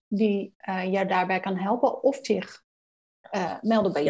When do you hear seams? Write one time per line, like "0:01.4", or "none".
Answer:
none

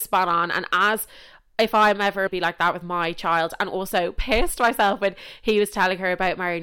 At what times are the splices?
0:02.3

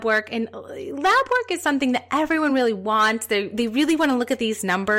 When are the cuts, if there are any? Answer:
none

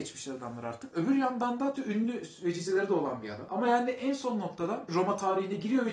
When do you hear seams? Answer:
0:01.8
0:04.9

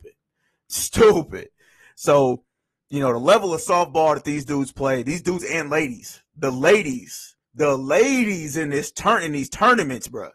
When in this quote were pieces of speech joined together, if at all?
0:07.4

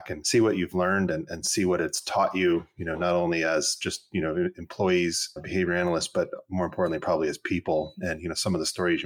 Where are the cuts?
none

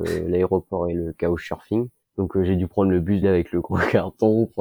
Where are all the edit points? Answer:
0:02.0
0:03.2

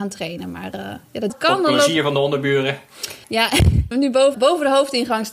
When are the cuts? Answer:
0:01.3
0:03.2
0:03.9
0:04.3

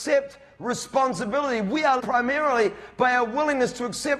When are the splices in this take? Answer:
0:02.0

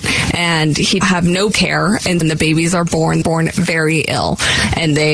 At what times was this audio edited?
0:01.0
0:01.5
0:02.2
0:03.2

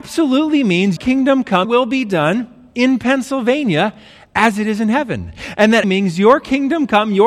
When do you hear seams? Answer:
0:01.0
0:01.6
0:05.8

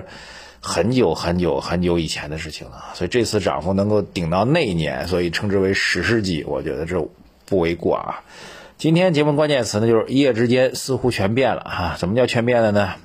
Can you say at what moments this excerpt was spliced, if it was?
none

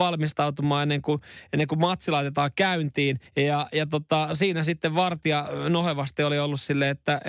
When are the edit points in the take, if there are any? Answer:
0:03.3

